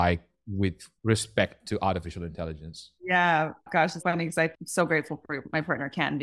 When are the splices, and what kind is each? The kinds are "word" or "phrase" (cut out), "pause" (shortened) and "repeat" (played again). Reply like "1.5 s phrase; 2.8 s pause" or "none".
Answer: 1.0 s pause; 3.0 s pause; 4.0 s word